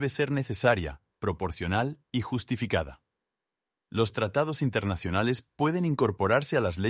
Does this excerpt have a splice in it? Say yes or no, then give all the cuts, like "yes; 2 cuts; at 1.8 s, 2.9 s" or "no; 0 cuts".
no; 0 cuts